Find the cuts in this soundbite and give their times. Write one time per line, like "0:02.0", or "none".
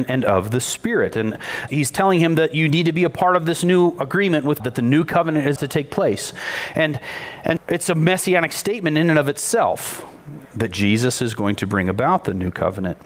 0:01.7
0:04.6
0:05.6
0:07.6